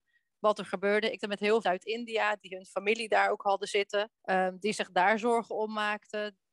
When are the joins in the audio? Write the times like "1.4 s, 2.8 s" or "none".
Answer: 1.2 s, 1.6 s, 4.1 s